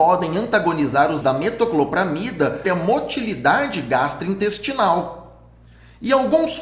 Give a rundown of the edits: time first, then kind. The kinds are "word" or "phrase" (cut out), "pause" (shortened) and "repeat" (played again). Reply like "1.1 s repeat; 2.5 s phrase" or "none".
1.2 s word; 2.6 s word